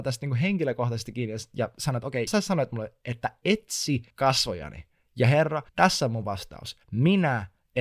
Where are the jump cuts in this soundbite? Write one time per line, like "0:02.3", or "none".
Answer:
0:02.3
0:04.1
0:05.7
0:06.8

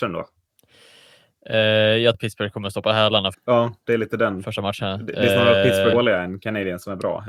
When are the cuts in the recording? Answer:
0:02.1
0:03.3
0:05.9

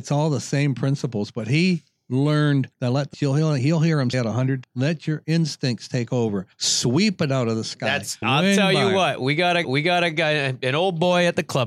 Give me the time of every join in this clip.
0:02.7
0:03.1
0:04.1
0:04.6
0:06.5
0:08.2
0:09.6

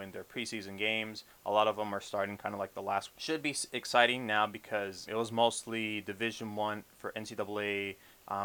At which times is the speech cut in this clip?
0:03.1
0:05.1

